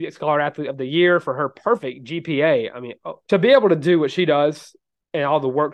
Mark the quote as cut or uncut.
cut